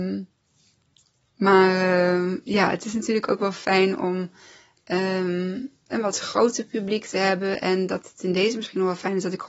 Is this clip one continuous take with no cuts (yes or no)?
yes